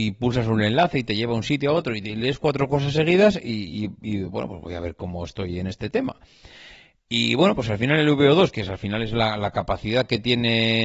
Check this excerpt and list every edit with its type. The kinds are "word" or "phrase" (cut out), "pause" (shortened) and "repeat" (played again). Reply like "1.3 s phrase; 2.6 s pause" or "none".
none